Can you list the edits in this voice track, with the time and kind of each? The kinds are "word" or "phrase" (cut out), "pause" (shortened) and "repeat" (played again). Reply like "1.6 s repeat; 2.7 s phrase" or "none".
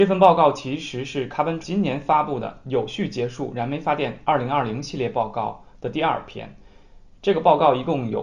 1.6 s word